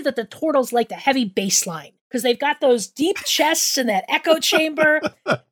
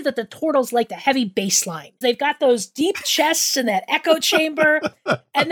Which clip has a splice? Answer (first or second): second